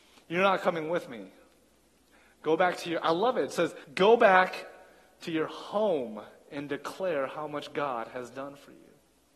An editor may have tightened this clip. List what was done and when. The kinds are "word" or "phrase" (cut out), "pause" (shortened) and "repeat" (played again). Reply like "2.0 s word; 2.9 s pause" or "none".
3.8 s pause